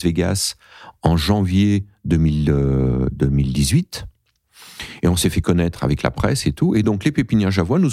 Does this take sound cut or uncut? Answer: uncut